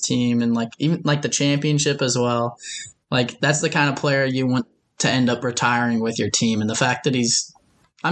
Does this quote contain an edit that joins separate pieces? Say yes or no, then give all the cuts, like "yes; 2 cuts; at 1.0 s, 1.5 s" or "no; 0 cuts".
no; 0 cuts